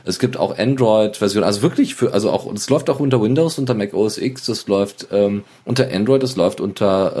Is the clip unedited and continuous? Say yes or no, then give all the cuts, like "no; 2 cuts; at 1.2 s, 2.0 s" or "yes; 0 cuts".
yes; 0 cuts